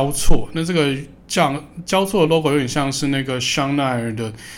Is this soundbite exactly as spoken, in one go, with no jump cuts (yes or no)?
yes